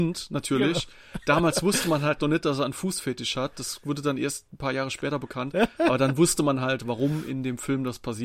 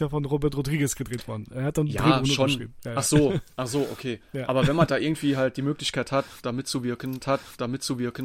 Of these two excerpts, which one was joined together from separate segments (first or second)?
second